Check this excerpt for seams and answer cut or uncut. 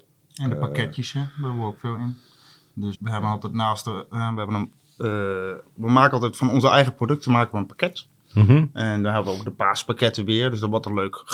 cut